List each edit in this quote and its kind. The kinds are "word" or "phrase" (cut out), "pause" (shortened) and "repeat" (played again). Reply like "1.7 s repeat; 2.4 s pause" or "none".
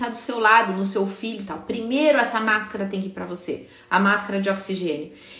none

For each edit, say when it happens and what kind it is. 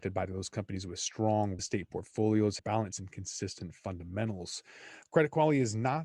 1.6 s word; 2.6 s word; 2.9 s word

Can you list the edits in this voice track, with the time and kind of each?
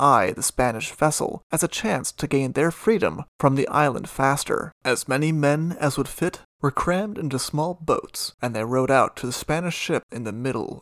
4.8 s pause

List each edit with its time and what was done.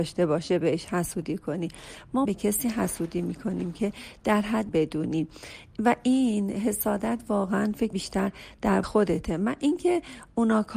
2.3 s word; 4.7 s word; 7.9 s word; 8.8 s word

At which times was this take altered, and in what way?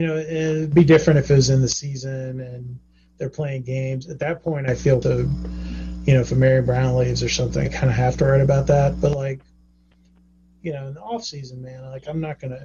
5.0 s word; 7.7 s word

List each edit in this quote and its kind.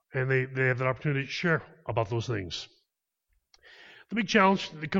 none

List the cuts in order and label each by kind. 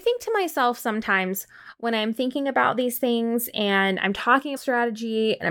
4.6 s word

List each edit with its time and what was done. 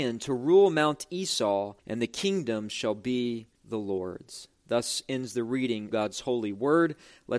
1.8 s pause; 3.6 s pause; 5.9 s word

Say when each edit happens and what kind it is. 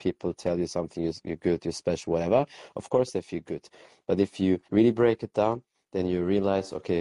4.6 s pause

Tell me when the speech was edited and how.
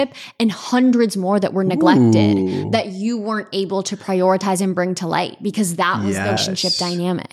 6.4 s word

